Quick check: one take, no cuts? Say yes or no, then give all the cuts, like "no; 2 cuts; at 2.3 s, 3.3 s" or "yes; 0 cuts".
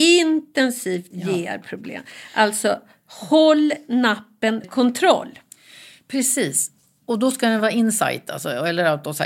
no; 2 cuts; at 1.1 s, 4.6 s